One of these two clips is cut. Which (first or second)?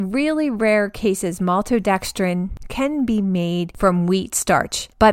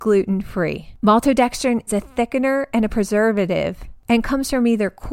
second